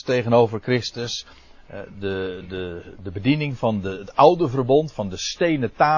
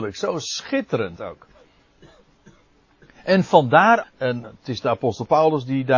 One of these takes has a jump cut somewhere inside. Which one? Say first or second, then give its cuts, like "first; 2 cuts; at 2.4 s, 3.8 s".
second; 2 cuts; at 4.0 s, 4.4 s